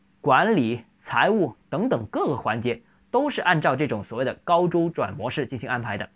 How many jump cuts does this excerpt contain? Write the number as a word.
zero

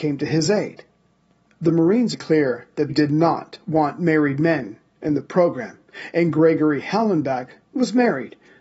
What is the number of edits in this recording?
two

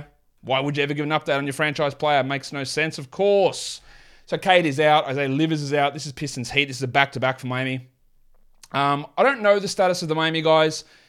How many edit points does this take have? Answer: zero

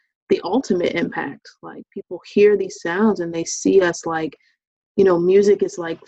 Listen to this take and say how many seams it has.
zero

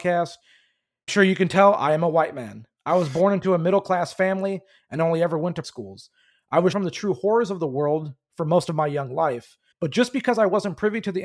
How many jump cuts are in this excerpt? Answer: four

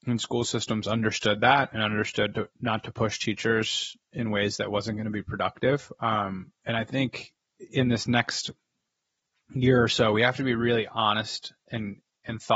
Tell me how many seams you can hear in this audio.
zero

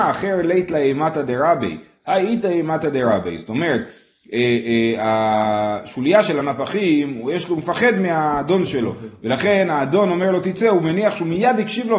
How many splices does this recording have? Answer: zero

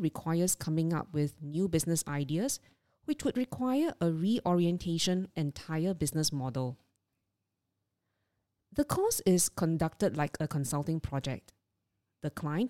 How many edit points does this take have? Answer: one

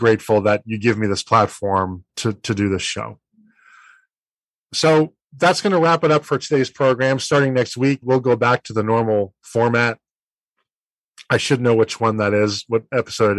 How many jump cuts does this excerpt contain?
two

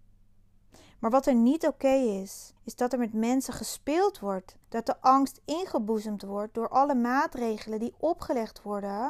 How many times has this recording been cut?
two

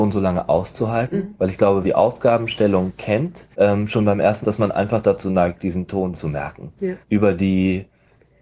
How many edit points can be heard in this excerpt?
five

